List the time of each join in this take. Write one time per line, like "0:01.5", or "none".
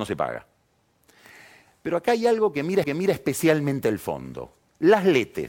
0:02.8